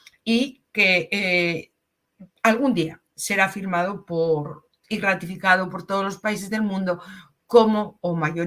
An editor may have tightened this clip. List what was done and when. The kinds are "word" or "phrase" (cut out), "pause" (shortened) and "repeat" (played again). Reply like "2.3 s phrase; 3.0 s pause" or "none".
2.3 s pause